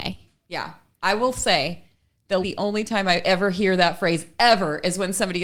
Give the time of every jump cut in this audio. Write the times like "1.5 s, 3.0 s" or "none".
2.4 s